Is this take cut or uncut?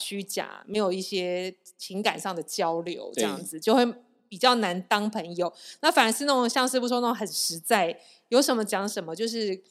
uncut